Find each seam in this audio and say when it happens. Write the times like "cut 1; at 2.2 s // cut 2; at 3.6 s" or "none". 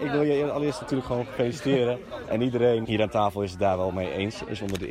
cut 1; at 2.8 s